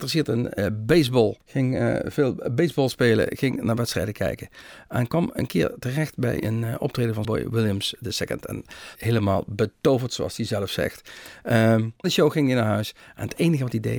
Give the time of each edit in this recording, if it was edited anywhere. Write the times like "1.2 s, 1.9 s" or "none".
1.4 s, 7.2 s, 8.9 s, 12.0 s